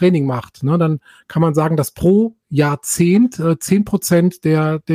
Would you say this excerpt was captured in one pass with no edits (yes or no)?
yes